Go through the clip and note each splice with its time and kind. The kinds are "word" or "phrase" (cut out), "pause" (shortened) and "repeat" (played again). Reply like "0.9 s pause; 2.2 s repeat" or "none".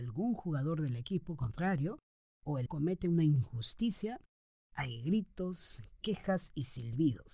2.7 s word